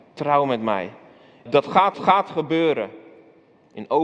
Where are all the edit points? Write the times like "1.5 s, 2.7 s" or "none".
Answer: 1.5 s, 1.9 s